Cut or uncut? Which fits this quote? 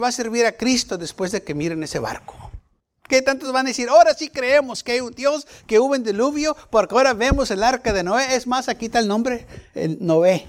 uncut